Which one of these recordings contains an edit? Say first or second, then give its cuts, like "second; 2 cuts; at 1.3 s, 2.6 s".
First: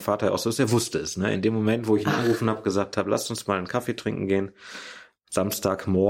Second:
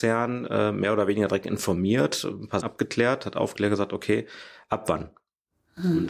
second; 1 cut; at 2.6 s